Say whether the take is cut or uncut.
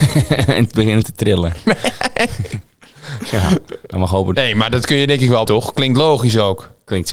cut